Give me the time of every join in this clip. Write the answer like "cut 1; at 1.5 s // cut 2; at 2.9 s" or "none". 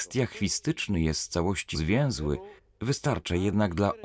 cut 1; at 1.7 s // cut 2; at 2.6 s